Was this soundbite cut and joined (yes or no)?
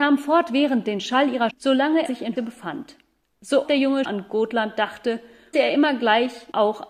yes